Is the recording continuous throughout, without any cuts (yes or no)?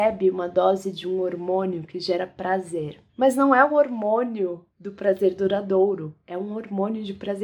no